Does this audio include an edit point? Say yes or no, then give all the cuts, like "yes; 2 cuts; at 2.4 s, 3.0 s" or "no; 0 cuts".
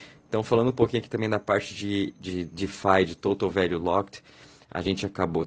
no; 0 cuts